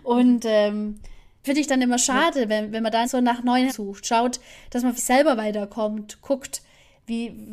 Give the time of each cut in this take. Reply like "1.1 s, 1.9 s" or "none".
1.4 s, 2.7 s, 3.0 s, 3.7 s, 5.0 s